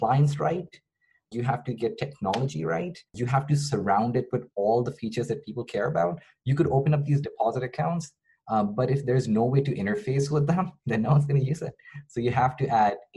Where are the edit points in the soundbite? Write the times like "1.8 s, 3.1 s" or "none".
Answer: 1.3 s, 3.1 s